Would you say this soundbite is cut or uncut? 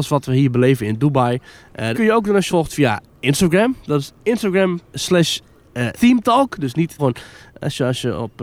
cut